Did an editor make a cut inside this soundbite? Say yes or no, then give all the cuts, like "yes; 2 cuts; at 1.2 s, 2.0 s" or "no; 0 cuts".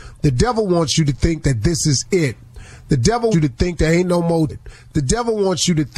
yes; 2 cuts; at 3.3 s, 4.5 s